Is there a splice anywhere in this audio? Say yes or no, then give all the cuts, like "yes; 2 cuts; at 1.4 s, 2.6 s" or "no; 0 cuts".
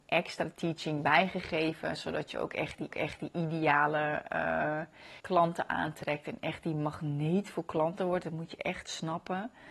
yes; 2 cuts; at 2.9 s, 5.2 s